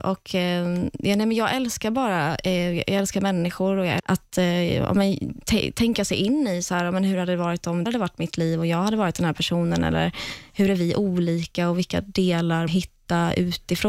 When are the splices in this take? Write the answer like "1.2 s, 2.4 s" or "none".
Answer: 4.0 s, 7.9 s, 12.7 s